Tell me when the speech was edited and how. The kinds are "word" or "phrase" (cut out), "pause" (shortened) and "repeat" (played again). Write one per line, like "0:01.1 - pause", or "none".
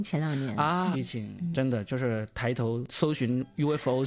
0:00.9 - word
0:01.5 - word